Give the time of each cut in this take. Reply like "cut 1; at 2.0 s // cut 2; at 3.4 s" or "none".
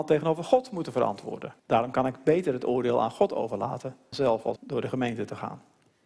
cut 1; at 1.6 s // cut 2; at 4.1 s // cut 3; at 4.6 s